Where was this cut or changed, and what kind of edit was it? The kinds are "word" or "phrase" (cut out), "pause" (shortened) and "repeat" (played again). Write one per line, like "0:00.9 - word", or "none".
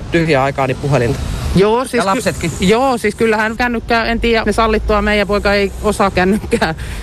0:03.6 - word
0:04.4 - word
0:06.1 - word